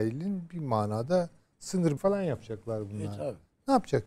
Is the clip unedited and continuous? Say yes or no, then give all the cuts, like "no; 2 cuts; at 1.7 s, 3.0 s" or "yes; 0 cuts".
no; 1 cut; at 2.0 s